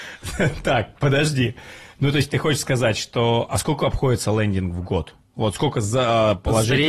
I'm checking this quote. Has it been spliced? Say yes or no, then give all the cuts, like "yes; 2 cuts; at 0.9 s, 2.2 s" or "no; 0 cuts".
no; 0 cuts